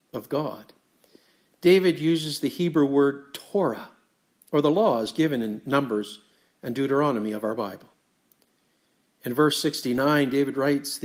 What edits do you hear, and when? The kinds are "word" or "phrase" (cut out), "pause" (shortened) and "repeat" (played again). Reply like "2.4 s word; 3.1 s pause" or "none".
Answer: none